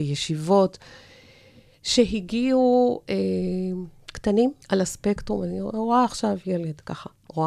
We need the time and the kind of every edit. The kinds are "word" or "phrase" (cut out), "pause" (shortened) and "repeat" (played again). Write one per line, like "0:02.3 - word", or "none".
0:04.6 - pause